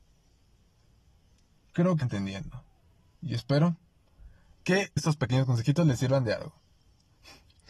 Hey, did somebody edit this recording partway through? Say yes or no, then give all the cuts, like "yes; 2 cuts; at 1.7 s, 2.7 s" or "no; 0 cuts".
yes; 3 cuts; at 2.0 s, 2.8 s, 5.0 s